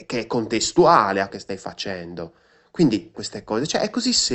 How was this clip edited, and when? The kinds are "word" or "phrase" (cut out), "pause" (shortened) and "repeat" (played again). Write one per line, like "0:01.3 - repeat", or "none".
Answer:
0:01.3 - word
0:03.1 - word